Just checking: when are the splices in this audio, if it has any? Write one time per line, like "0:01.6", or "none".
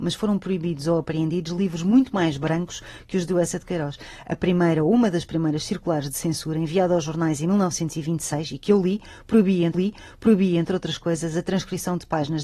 0:09.7